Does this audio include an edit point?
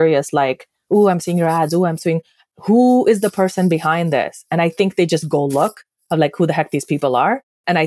no; 0 cuts

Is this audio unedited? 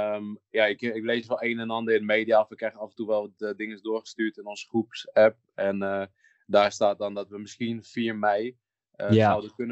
yes; 0 cuts

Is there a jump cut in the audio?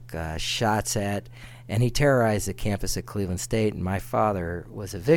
no; 0 cuts

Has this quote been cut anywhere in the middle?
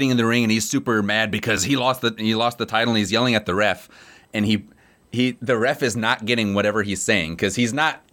no; 0 cuts

